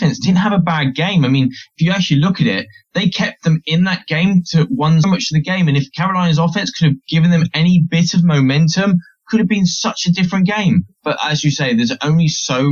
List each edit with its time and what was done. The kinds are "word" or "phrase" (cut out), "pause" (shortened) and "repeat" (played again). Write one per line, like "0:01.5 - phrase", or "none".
0:05.0 - phrase